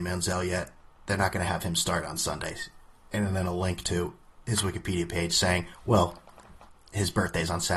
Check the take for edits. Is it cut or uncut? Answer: uncut